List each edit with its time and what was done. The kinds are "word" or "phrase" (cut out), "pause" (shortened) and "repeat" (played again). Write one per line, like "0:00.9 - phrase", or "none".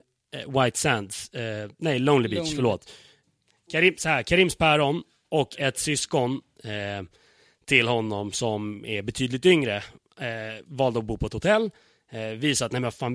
none